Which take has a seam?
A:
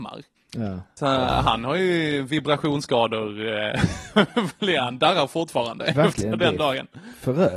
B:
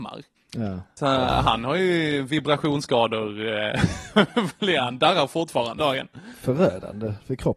B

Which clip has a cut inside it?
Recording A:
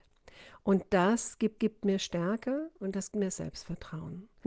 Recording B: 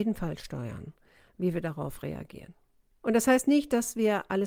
A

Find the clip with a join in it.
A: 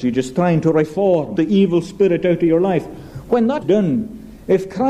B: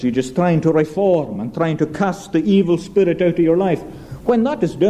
A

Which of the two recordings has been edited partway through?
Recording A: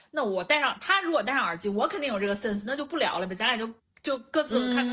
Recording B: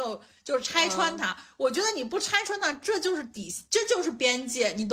A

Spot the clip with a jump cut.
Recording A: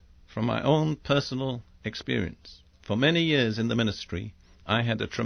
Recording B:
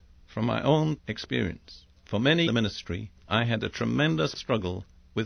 B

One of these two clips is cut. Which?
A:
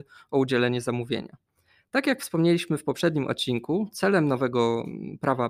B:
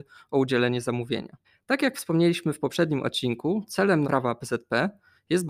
B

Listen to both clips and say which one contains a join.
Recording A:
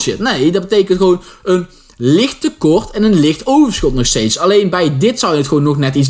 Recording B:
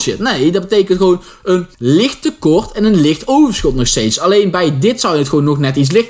B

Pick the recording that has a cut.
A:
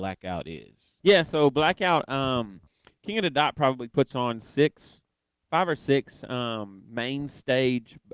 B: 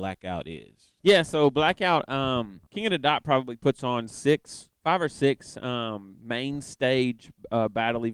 B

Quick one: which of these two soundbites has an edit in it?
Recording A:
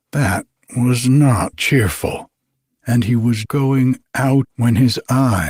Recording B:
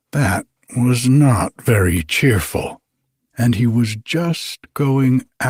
A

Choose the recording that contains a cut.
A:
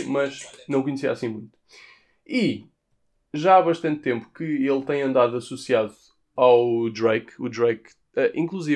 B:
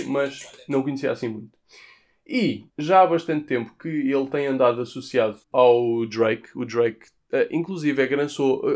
B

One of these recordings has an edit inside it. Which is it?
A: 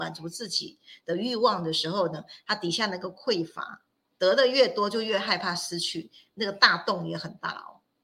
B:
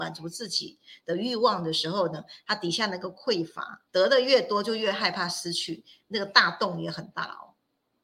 B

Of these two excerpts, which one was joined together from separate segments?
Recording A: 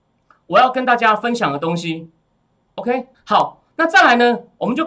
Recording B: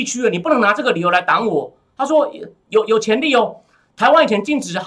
A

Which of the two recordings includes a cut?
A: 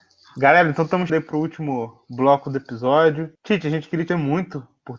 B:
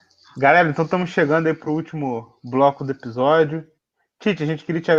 A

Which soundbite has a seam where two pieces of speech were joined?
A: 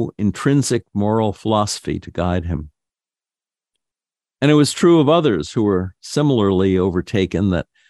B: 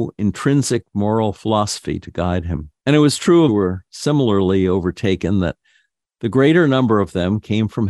B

